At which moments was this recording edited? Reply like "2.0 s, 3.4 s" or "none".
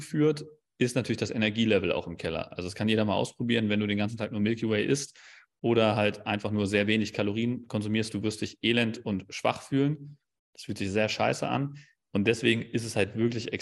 none